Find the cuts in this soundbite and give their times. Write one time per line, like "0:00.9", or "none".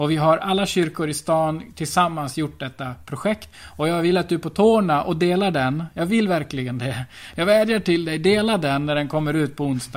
0:03.5